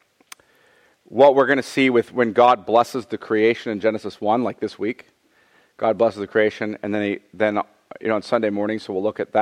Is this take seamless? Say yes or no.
yes